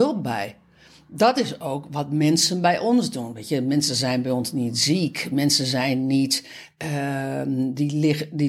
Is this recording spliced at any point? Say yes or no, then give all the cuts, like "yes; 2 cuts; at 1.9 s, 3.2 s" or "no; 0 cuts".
no; 0 cuts